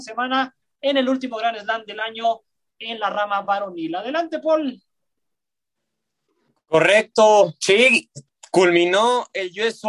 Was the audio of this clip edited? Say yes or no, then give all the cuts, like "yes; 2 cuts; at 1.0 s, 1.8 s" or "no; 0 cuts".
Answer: no; 0 cuts